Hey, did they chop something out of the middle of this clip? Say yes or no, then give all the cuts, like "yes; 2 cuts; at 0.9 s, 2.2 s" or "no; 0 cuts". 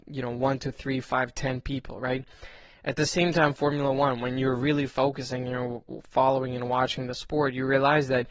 no; 0 cuts